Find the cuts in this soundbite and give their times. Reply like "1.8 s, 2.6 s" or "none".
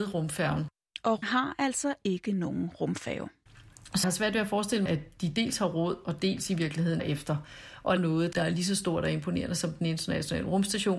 1.2 s, 4.0 s, 4.9 s, 7.0 s, 8.0 s, 8.3 s

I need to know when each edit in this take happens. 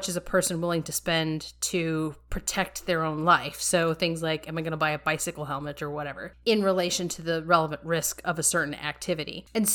none

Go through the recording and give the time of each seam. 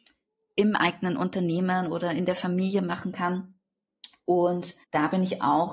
4.8 s

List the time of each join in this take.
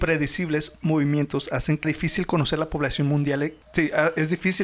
1.8 s, 3.6 s

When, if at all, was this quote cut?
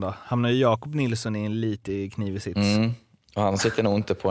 none

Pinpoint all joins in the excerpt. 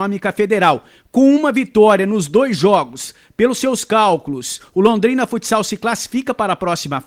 none

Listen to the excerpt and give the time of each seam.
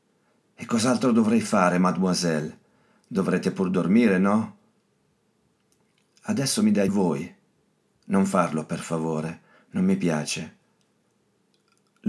6.9 s

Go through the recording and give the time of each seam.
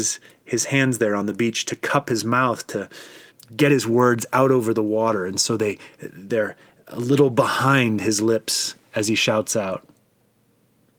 3.3 s

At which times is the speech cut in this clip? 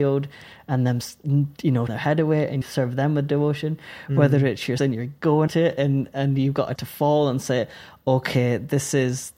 1.9 s, 2.6 s, 4.8 s, 5.5 s, 6.8 s

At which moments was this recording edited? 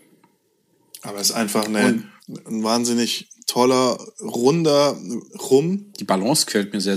2.2 s, 5.3 s

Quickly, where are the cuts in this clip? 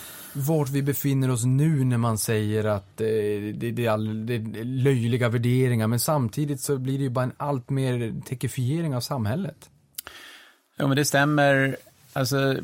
none

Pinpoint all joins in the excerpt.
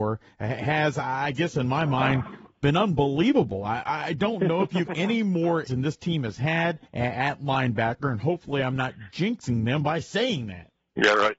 4.9 s, 5.7 s, 6.9 s

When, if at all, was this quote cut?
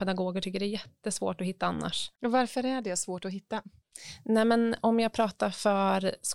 2.2 s

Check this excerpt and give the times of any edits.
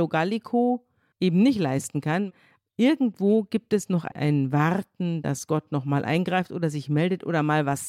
none

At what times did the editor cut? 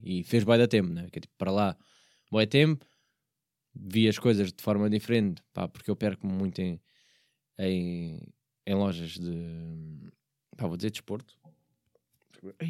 none

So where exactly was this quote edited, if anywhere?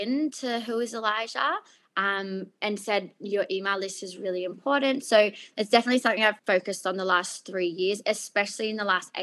6.4 s

